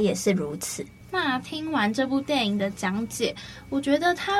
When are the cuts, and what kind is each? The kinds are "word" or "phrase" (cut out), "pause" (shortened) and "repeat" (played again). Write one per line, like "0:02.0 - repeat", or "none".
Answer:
none

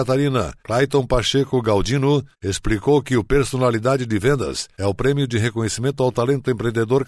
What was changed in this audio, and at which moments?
0:05.0 - word

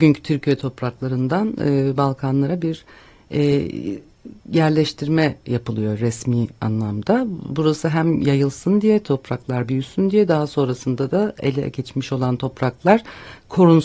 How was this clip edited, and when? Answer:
0:04.4 - pause

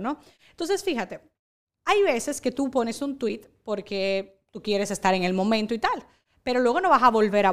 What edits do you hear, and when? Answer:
none

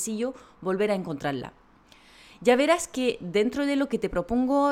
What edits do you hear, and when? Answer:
none

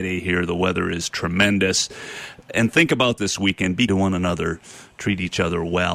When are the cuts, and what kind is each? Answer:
0:03.2 - word
0:03.9 - word

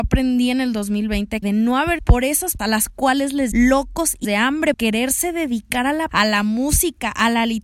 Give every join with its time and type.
0:01.4 - word
0:02.0 - word
0:02.6 - word
0:03.5 - word
0:04.2 - word
0:04.7 - word
0:06.1 - word

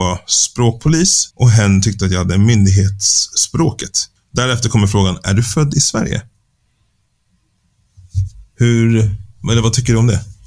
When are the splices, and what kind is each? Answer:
0:01.3 - pause
0:04.2 - pause

